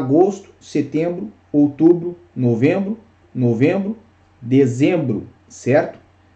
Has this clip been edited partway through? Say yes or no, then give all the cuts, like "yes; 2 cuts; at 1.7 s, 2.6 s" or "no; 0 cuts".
yes; 1 cut; at 3.2 s